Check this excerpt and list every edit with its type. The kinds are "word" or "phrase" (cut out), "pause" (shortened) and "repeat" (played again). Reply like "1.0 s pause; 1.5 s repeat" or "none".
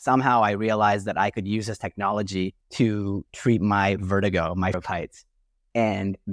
2.6 s pause; 4.7 s word